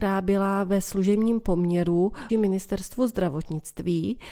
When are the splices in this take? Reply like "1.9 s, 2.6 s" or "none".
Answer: 2.3 s